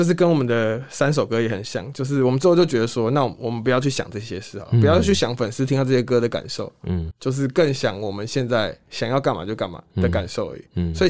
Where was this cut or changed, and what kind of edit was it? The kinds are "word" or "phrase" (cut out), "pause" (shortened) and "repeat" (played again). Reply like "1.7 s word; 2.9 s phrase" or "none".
7.1 s word